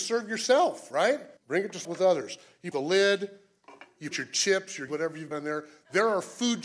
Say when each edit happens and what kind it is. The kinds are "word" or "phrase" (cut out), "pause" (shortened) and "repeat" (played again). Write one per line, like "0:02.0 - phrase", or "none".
0:01.4 - pause
0:01.8 - word
0:02.7 - word
0:04.1 - word
0:04.9 - word
0:05.3 - word